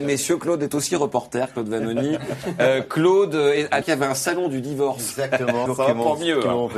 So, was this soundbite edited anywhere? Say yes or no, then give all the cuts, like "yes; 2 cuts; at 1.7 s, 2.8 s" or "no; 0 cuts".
yes; 2 cuts; at 3.8 s, 5.7 s